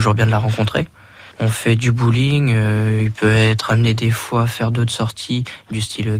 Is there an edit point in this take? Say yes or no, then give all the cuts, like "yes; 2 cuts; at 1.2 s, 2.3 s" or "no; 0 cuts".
yes; 1 cut; at 1.3 s